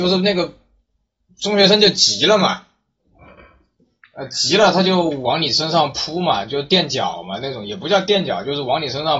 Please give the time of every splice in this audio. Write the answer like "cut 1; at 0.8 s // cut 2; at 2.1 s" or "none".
none

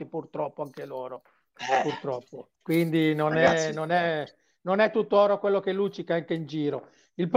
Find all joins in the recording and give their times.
cut 1; at 2.6 s

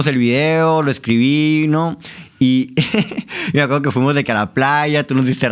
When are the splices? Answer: none

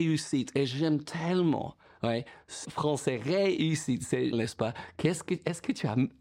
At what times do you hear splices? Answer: cut 1; at 2.6 s // cut 2; at 4.3 s

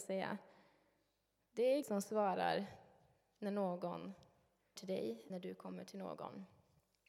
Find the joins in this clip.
cut 1; at 1.8 s // cut 2; at 4.8 s // cut 3; at 5.3 s

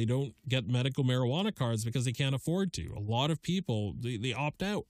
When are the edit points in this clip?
none

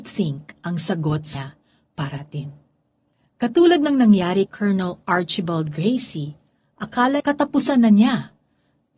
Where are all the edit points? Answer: cut 1; at 1.3 s // cut 2; at 2.2 s // cut 3; at 4.5 s // cut 4; at 7.2 s

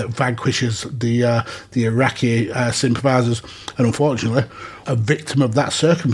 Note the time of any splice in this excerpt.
cut 1; at 4.8 s

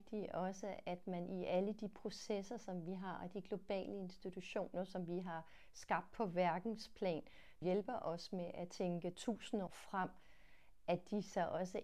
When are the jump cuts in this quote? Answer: cut 1; at 7.6 s // cut 2; at 9.7 s

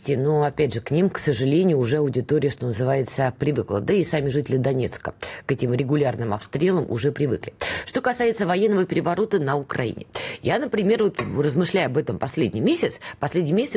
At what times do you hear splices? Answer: none

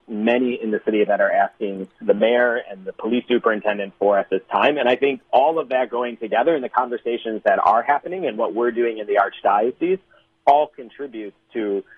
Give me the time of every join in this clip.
cut 1; at 1.1 s // cut 2; at 2.0 s

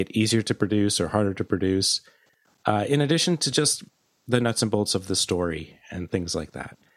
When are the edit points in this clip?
none

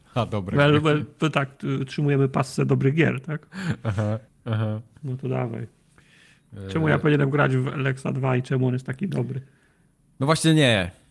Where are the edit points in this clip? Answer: cut 1; at 4.3 s

